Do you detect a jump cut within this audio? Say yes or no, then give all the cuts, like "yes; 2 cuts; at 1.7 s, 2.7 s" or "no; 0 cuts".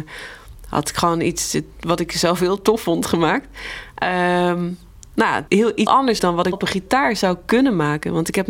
yes; 4 cuts; at 5.5 s, 5.9 s, 6.2 s, 6.5 s